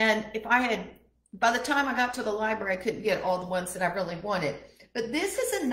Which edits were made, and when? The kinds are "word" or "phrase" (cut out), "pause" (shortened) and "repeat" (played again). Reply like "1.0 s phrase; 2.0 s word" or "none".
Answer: none